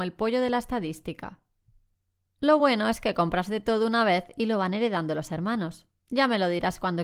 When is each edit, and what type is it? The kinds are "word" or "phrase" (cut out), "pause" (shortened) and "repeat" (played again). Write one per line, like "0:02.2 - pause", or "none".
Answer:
none